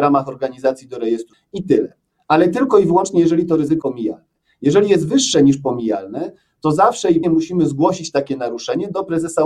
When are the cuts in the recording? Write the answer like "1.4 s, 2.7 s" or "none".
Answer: 1.3 s, 3.8 s, 7.2 s